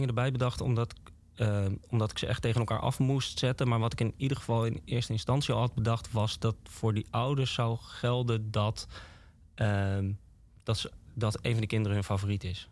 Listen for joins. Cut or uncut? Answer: uncut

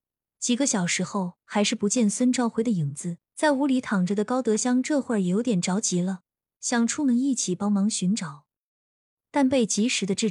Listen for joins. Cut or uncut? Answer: cut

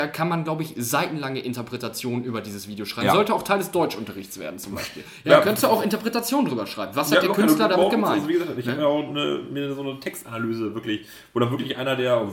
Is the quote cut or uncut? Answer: uncut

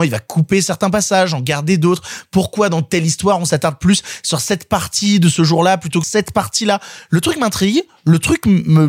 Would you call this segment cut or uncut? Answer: cut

